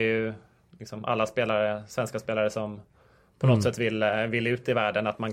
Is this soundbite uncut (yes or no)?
yes